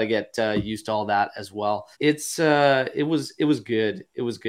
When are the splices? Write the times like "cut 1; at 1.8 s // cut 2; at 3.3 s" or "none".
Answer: cut 1; at 1.9 s